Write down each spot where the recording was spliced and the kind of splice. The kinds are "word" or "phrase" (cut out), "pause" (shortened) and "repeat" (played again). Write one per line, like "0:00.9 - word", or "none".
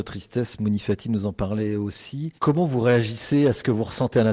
0:02.4 - pause